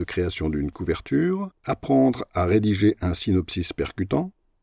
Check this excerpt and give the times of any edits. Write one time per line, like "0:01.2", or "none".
0:01.6